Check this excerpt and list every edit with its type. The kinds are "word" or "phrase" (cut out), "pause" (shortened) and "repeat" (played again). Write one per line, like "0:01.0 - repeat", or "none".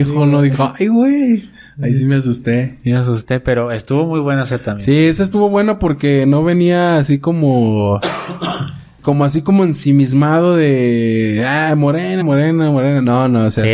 0:09.0 - word
0:12.2 - word